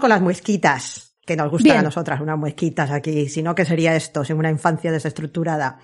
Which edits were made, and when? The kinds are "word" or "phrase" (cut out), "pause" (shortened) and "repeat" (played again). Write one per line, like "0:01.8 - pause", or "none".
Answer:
0:01.2 - pause